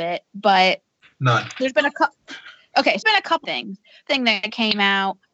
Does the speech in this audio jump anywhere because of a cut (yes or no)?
yes